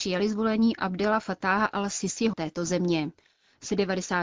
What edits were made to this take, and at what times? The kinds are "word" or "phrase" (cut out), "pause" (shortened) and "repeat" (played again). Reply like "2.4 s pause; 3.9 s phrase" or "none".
2.3 s phrase